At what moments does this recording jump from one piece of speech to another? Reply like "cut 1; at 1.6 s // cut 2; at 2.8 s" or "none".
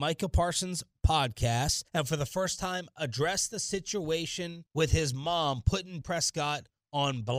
cut 1; at 1.9 s // cut 2; at 4.7 s // cut 3; at 6.0 s